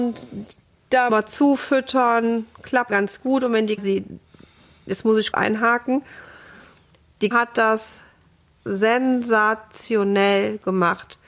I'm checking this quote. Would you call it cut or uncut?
cut